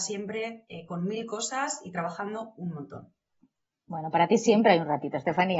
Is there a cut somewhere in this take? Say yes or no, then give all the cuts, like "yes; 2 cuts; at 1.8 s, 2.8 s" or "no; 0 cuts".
no; 0 cuts